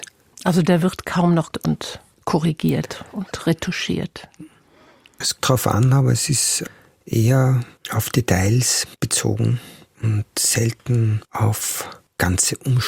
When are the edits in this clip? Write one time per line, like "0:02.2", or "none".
0:01.5
0:05.4